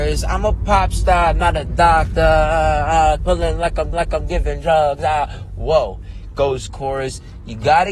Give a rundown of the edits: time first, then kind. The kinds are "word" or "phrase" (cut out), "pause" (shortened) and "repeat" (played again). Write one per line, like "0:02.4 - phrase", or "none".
0:03.2 - word
0:03.9 - repeat
0:06.7 - phrase